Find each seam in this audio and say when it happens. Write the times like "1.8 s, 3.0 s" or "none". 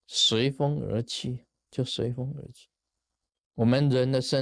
none